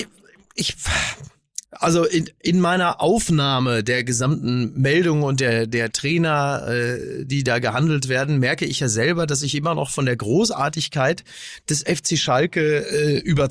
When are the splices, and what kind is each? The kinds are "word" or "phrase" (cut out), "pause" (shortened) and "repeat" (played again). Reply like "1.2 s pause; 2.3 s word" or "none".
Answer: 1.6 s pause